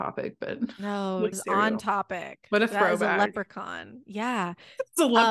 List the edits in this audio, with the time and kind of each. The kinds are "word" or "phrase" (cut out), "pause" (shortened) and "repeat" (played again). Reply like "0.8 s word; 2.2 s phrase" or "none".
1.3 s word